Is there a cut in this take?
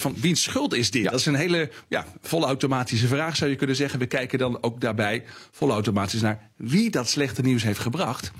no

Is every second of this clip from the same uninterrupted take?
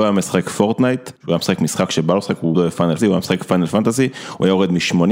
no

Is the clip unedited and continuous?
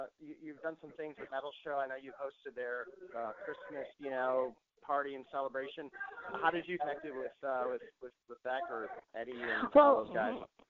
no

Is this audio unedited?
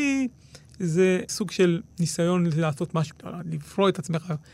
no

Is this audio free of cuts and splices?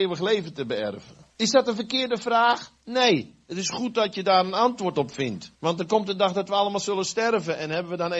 no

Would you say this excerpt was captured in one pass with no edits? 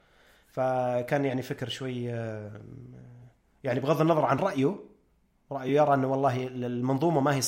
yes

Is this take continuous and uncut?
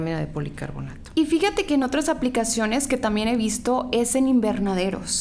yes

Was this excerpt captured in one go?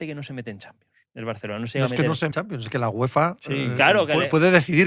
no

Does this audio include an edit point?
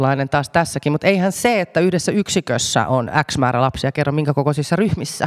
no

